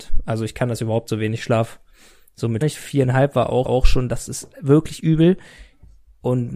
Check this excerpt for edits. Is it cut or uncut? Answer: cut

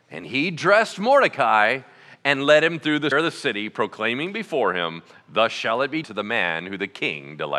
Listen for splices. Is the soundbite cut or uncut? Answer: cut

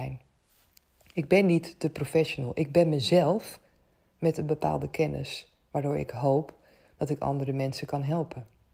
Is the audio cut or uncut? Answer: uncut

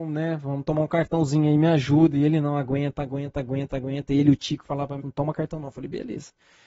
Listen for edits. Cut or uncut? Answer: cut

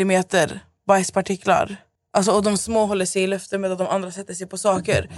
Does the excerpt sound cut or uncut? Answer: uncut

